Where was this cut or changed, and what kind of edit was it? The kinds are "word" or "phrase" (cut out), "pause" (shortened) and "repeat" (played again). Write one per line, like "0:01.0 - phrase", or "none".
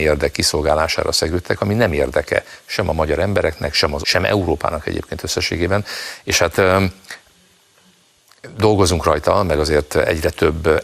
0:04.0 - word